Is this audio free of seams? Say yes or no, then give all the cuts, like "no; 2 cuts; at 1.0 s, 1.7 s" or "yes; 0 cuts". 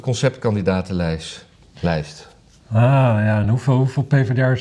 yes; 0 cuts